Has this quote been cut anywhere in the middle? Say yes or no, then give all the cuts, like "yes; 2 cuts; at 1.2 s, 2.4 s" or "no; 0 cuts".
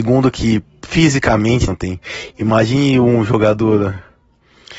yes; 1 cut; at 1.7 s